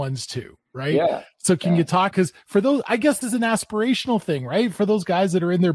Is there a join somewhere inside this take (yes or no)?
yes